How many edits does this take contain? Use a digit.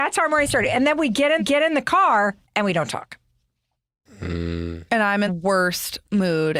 4